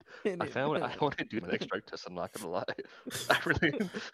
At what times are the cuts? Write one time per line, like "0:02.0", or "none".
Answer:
0:01.4